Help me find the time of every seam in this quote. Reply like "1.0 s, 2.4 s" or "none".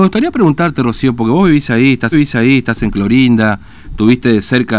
2.1 s

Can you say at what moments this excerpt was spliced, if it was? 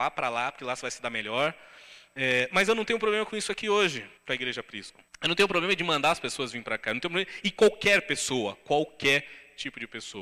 4.2 s, 5.1 s

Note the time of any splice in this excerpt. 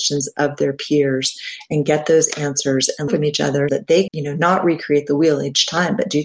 3.1 s, 3.7 s, 4.1 s

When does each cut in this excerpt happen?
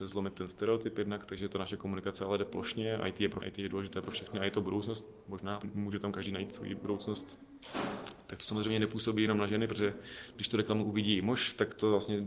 3.4 s, 5.6 s

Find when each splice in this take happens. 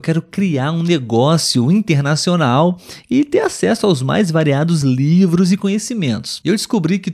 none

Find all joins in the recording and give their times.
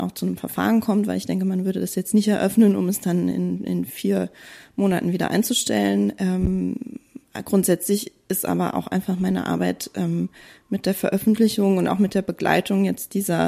none

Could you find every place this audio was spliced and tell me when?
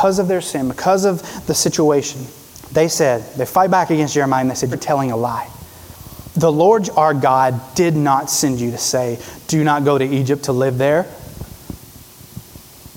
2.5 s, 4.7 s, 6.3 s

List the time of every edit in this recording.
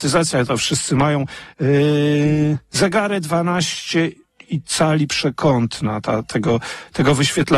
1.5 s, 4.7 s

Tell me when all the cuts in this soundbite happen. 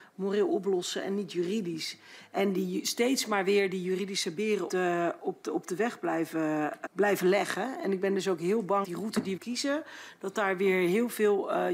4.7 s, 6.9 s, 8.8 s, 9.4 s

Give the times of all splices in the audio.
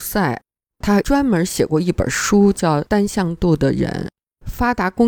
none

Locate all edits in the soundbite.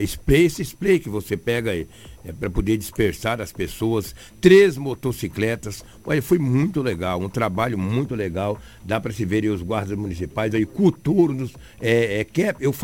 none

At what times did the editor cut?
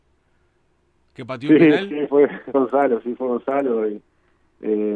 2.5 s

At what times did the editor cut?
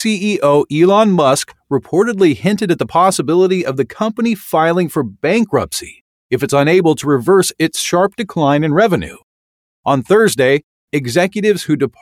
none

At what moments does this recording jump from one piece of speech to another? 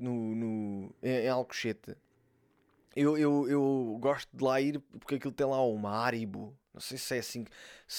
none

